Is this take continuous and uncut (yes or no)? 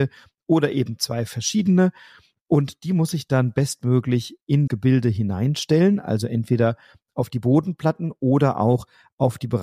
no